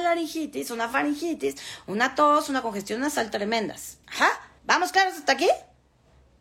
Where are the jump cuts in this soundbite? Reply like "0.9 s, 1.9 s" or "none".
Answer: 4.0 s, 4.6 s